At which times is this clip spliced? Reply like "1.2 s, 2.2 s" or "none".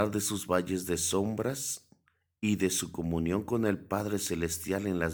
none

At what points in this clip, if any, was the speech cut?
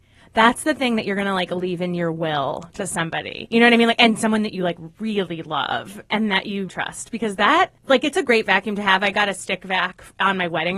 6.7 s, 7.8 s

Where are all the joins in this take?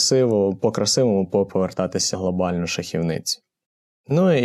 1.5 s, 2.1 s

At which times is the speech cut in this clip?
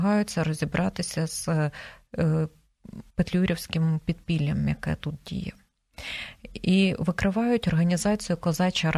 3.1 s

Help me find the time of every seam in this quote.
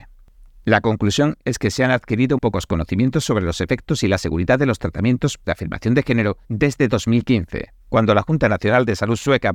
2.4 s, 5.4 s, 6.4 s, 7.8 s

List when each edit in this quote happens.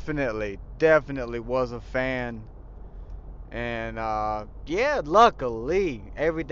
5.0 s

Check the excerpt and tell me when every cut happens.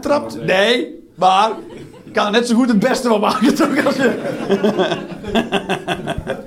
none

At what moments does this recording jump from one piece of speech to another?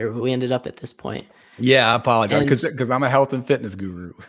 none

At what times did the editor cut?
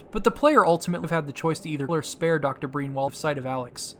1.0 s, 1.9 s, 3.1 s

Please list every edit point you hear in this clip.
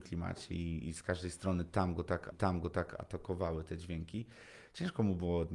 2.3 s

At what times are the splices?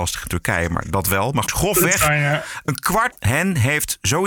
1.5 s, 3.1 s

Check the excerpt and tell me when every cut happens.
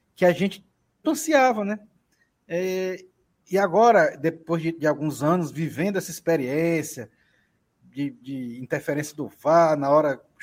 1.0 s, 8.2 s

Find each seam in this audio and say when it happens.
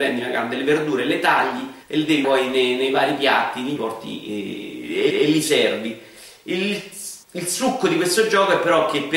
1.8 s, 2.2 s, 3.8 s, 5.1 s, 7.2 s

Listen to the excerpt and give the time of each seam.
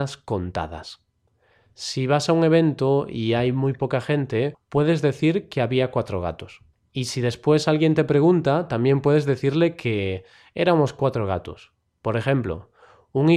none

